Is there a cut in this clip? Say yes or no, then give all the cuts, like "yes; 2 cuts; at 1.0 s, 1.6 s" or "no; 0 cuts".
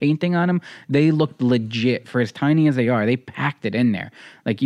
no; 0 cuts